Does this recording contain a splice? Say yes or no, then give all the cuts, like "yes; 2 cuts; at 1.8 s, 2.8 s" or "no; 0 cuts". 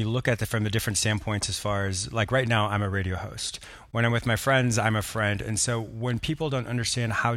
no; 0 cuts